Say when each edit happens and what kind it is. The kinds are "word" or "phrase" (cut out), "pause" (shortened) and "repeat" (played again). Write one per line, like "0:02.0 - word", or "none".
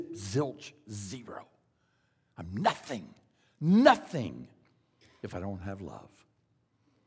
none